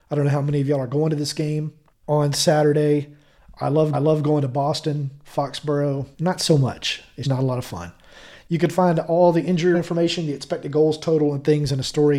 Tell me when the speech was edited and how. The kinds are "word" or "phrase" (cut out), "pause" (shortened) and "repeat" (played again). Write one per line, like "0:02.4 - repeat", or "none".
0:01.9 - pause
0:03.9 - repeat
0:06.1 - pause
0:07.2 - word
0:09.7 - word